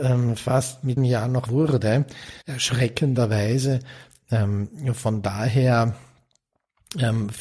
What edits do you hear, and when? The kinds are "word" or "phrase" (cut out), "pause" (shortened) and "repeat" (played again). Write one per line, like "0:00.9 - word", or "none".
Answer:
0:01.0 - word
0:01.5 - word
0:02.4 - pause